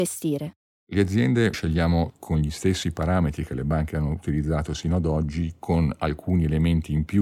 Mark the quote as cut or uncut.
cut